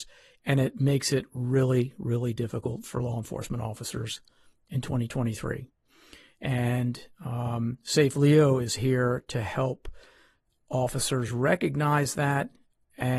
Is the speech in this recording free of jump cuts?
yes; 0 cuts

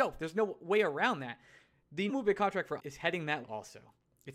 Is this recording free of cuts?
no; 3 cuts; at 2.1 s, 2.8 s, 3.4 s

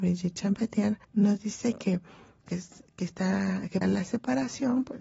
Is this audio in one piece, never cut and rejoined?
no; 3 cuts; at 1.0 s, 2.4 s, 3.8 s

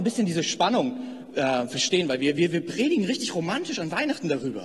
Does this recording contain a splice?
no; 0 cuts

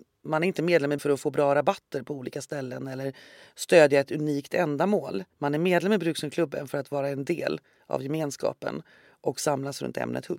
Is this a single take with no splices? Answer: no; 2 cuts; at 1.0 s, 5.3 s

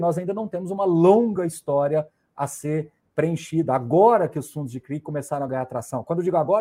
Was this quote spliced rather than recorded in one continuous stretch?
no; 0 cuts

